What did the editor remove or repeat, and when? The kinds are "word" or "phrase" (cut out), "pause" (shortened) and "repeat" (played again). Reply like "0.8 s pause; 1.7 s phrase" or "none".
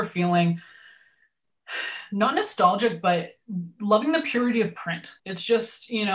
5.2 s pause